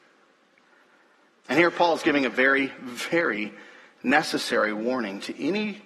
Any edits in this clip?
no; 0 cuts

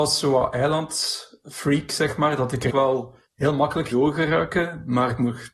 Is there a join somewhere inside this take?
yes; 3 cuts; at 2.7 s, 3.3 s, 3.9 s

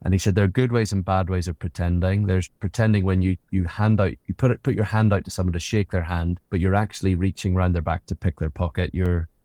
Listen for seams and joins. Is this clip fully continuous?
no; 1 cut; at 6.5 s

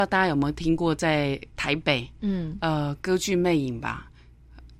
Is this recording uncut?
no; 1 cut; at 1.5 s

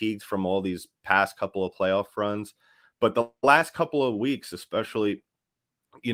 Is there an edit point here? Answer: no; 0 cuts

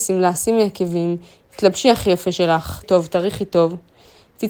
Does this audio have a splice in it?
yes; 1 cut; at 2.8 s

